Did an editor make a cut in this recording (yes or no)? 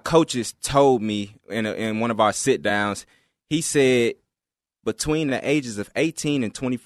no